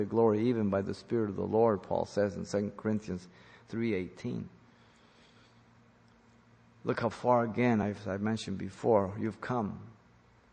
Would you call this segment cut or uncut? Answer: uncut